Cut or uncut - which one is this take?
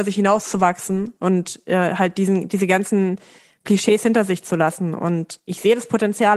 uncut